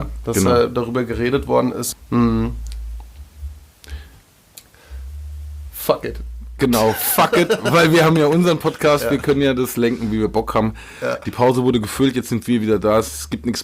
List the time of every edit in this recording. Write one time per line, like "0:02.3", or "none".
none